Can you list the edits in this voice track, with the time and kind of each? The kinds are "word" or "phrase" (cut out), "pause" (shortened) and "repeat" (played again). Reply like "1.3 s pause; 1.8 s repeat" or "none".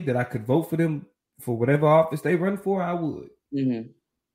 none